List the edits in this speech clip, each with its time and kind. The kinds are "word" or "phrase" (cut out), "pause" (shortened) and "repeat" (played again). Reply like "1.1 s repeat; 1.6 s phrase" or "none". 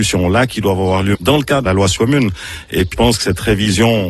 1.1 s word; 1.7 s phrase; 2.0 s word; 2.9 s word